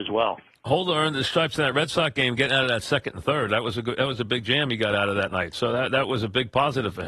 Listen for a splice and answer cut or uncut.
uncut